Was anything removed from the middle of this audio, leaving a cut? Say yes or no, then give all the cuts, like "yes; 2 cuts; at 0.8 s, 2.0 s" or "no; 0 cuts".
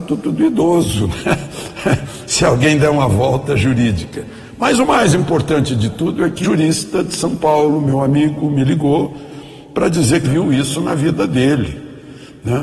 yes; 2 cuts; at 6.4 s, 10.2 s